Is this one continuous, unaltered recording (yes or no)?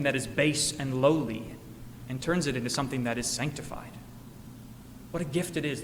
yes